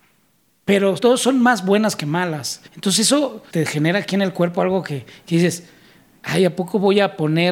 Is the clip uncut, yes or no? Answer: no